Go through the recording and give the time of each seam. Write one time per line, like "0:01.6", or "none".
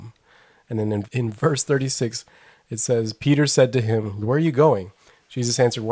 0:01.0
0:04.2